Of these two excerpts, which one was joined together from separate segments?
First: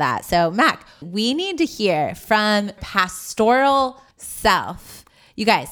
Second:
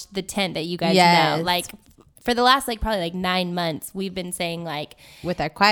first; 3 cuts; at 1.0 s, 2.8 s, 4.1 s

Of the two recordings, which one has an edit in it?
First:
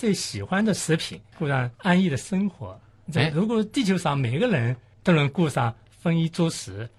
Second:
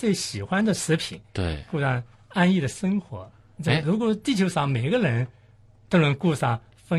first; 3 cuts; at 1.3 s, 1.7 s, 4.9 s

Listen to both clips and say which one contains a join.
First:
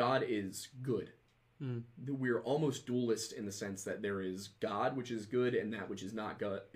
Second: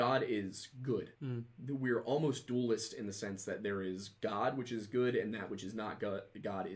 second; 1 cut; at 1.1 s

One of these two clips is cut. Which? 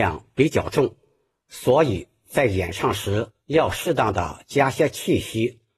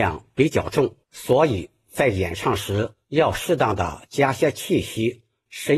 second; 1 cut; at 1.0 s

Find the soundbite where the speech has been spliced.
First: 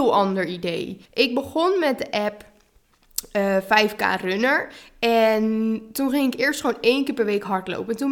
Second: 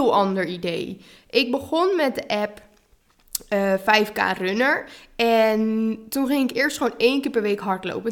first; 1 cut; at 1.1 s

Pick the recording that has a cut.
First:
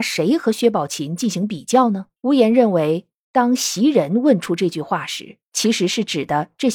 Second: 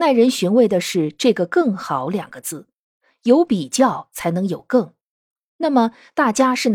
first; 1 cut; at 2.2 s

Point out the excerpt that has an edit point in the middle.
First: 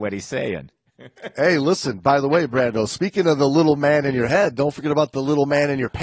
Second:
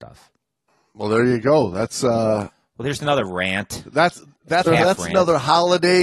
second; 1 cut; at 4.7 s

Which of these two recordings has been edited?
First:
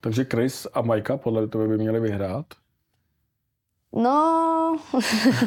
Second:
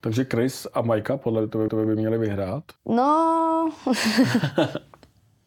second; 2 cuts; at 1.7 s, 2.8 s

